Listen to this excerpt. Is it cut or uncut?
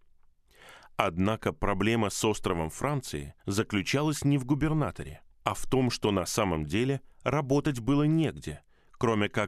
cut